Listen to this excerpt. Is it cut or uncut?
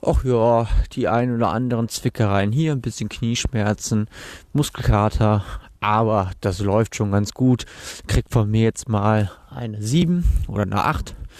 uncut